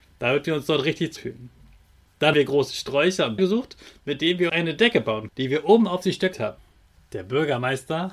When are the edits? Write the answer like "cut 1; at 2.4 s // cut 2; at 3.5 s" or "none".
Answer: cut 1; at 1.2 s // cut 2; at 2.3 s // cut 3; at 3.4 s // cut 4; at 4.5 s // cut 5; at 5.3 s // cut 6; at 6.3 s